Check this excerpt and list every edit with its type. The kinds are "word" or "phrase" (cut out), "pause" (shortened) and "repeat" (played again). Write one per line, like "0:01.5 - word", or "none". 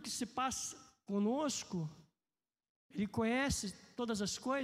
none